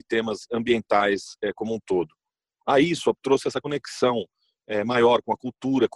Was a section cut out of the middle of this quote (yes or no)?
no